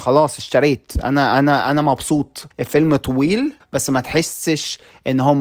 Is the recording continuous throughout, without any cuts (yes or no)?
no